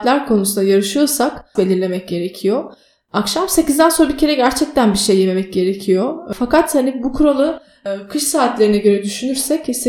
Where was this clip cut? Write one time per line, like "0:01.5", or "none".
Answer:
0:01.6